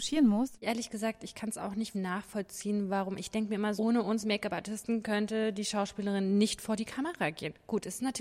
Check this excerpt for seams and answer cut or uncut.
cut